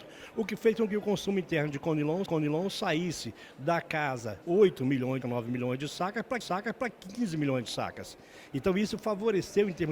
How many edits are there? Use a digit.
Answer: 4